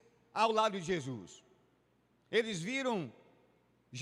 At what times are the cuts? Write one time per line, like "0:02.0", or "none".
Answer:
none